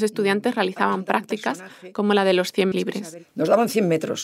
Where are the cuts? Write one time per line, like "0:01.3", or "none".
0:02.7